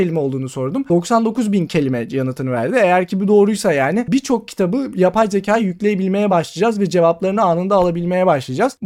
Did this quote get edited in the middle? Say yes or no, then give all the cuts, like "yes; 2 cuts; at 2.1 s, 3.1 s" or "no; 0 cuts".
no; 0 cuts